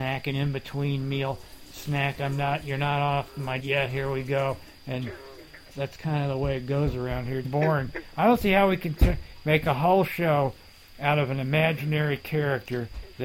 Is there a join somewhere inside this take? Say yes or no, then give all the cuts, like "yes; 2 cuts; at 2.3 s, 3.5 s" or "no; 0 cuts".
yes; 3 cuts; at 3.6 s, 5.7 s, 7.4 s